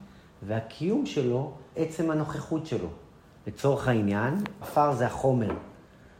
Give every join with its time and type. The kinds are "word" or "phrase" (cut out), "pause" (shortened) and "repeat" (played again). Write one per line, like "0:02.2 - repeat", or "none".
0:01.7 - word
0:04.6 - word